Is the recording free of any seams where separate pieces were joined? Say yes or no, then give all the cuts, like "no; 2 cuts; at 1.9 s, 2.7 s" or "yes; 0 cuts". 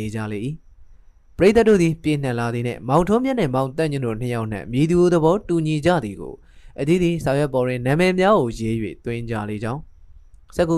yes; 0 cuts